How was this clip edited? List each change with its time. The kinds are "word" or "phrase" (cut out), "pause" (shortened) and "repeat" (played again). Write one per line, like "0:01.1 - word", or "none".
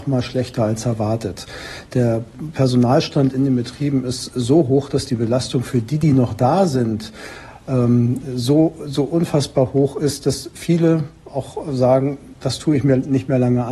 none